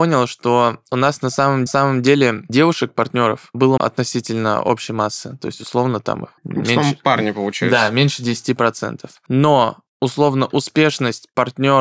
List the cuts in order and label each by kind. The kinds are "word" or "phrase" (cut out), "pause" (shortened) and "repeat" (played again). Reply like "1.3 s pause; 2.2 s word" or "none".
1.7 s repeat; 3.8 s word; 6.4 s pause

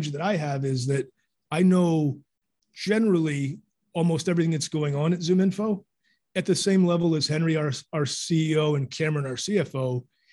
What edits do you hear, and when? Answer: none

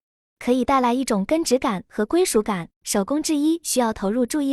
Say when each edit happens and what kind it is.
2.7 s pause

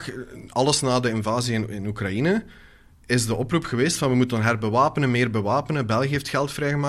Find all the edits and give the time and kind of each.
none

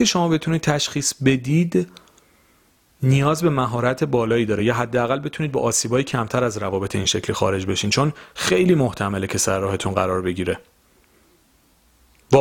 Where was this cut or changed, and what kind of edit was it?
none

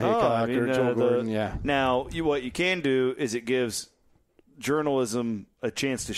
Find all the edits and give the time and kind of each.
none

